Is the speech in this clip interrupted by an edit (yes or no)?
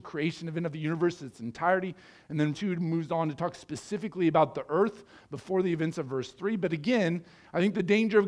yes